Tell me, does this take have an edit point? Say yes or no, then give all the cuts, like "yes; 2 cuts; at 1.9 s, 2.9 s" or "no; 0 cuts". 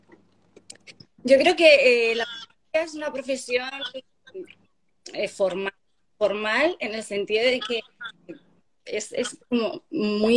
no; 0 cuts